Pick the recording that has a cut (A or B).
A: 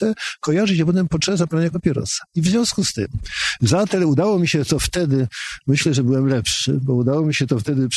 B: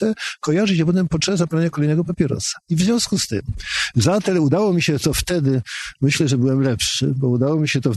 A